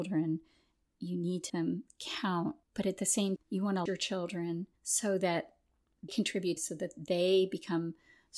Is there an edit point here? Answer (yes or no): yes